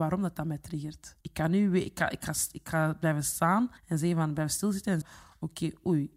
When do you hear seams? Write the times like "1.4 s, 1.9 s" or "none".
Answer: 1.2 s, 3.8 s, 5.0 s